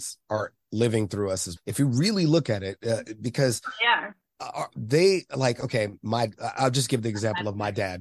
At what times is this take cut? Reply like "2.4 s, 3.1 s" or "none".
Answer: 1.6 s